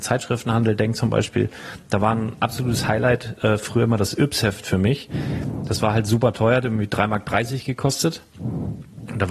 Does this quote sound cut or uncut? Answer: uncut